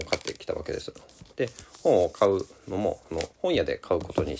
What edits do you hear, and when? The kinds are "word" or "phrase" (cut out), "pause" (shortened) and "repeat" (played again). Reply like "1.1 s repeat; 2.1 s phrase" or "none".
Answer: 1.3 s pause; 3.3 s pause